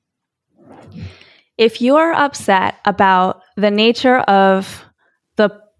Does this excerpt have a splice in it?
no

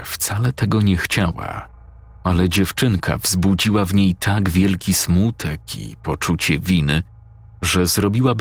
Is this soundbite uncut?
yes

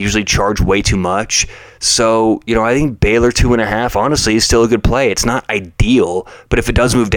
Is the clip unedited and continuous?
yes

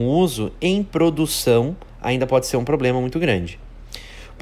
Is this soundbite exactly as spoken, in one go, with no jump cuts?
yes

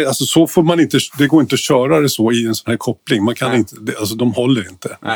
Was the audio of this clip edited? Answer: no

